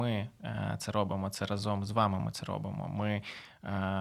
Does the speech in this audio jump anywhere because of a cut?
no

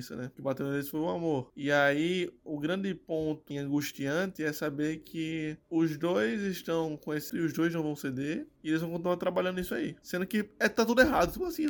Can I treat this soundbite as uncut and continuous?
no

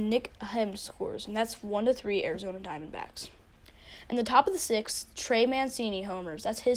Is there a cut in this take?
no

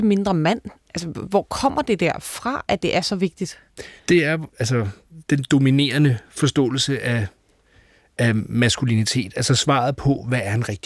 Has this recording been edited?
yes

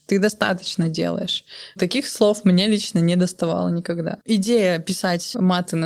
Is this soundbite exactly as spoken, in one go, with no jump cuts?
no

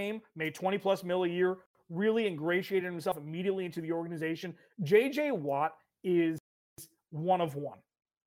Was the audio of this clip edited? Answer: no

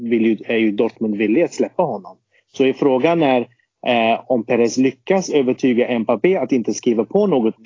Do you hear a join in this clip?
no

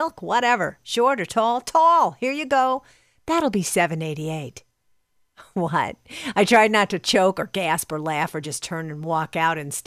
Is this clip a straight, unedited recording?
yes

